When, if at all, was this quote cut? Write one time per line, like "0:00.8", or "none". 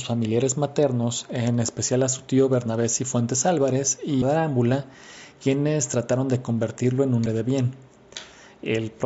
0:04.2
0:07.3